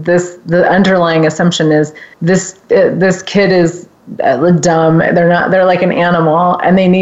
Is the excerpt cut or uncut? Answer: cut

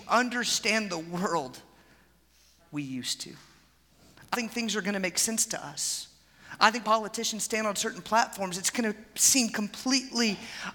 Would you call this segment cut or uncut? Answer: cut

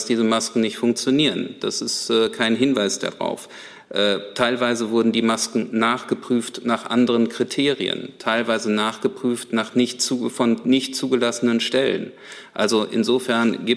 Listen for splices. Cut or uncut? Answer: uncut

